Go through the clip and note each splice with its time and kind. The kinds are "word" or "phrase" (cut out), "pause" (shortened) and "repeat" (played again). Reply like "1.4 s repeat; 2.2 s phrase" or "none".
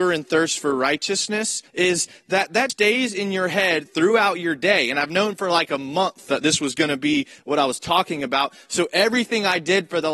1.7 s pause; 2.7 s word